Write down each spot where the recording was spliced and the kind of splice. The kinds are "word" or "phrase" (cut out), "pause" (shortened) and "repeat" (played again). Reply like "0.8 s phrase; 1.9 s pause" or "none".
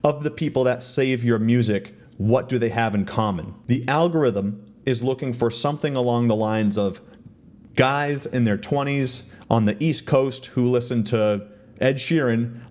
none